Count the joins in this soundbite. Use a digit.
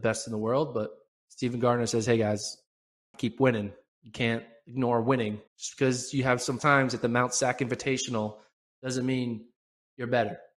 4